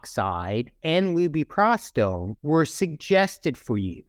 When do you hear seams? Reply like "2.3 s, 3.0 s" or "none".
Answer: 2.4 s